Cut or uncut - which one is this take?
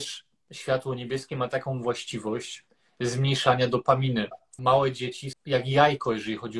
cut